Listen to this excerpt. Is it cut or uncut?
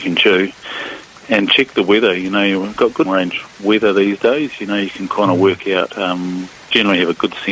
cut